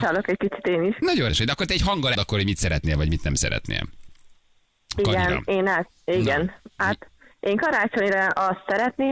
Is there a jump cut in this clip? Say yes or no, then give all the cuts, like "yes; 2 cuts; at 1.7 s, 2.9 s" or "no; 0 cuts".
yes; 2 cuts; at 1.3 s, 2.1 s